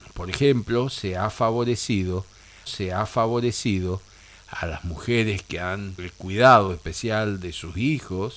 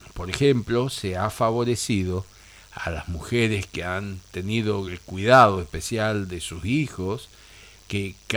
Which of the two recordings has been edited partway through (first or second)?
first